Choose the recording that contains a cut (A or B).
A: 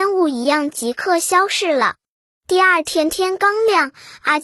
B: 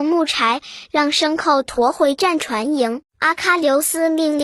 B